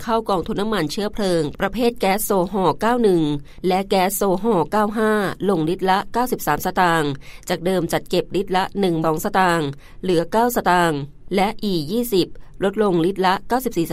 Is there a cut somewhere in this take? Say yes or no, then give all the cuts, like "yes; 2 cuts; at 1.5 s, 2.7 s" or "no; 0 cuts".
yes; 1 cut; at 9.0 s